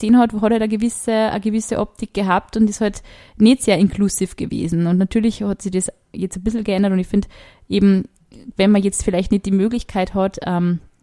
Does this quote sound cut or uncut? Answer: uncut